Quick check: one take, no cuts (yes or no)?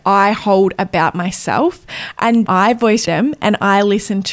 no